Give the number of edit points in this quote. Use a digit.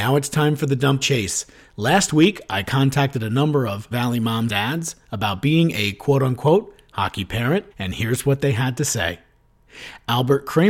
4